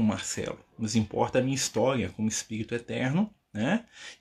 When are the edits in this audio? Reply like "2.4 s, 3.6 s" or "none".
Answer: none